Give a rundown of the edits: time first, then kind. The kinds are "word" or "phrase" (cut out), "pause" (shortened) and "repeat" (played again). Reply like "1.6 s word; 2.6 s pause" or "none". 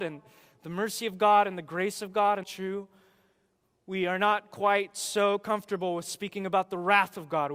2.4 s phrase